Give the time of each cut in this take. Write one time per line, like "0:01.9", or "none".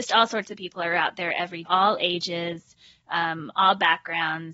0:01.6